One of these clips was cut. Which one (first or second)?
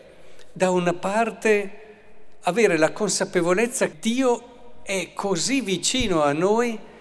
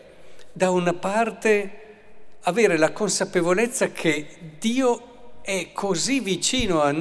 first